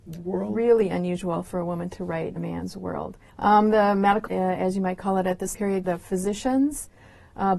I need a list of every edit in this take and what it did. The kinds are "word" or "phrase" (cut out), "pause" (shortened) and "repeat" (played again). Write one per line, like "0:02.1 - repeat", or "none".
0:02.4 - word
0:03.3 - pause
0:04.3 - word
0:05.5 - word
0:05.8 - word

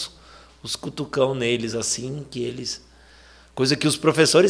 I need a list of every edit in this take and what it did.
none

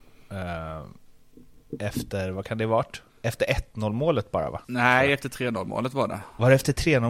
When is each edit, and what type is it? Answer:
0:03.1 - pause
0:04.6 - pause

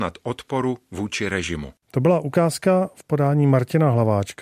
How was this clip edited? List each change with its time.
0:01.8 - pause

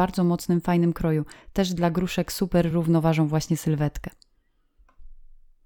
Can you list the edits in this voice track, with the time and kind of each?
none

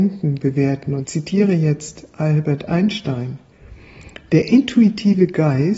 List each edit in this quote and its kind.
0:01.0 - word

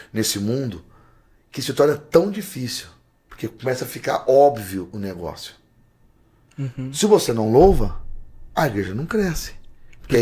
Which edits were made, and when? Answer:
none

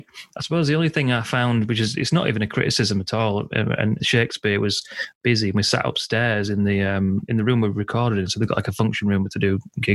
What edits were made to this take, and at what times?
0:04.0 - word

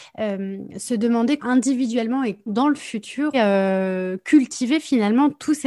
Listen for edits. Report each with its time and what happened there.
0:01.4 - phrase
0:02.5 - word
0:03.3 - phrase

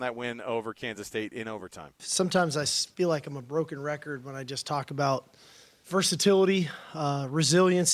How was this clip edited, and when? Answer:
none

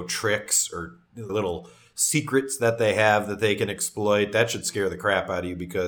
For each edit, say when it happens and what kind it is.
0:01.3 - word

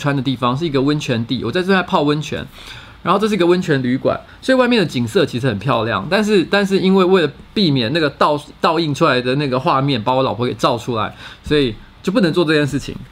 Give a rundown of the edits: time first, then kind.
0:07.5 - pause

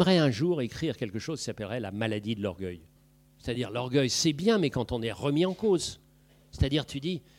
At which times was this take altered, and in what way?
0:03.0 - pause

